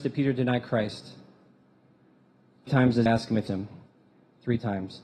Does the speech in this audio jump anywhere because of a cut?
yes; 3 cuts; at 2.7 s, 3.1 s, 3.5 s

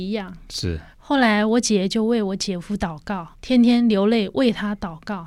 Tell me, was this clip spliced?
yes; 2 cuts; at 0.9 s, 3.3 s

